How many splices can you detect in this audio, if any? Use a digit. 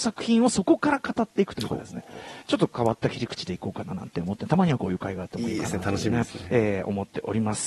1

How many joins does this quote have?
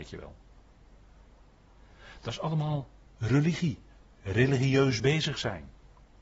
0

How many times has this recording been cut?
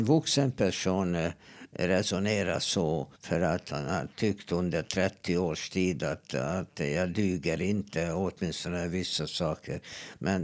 2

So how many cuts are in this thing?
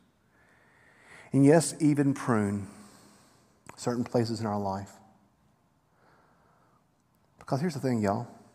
0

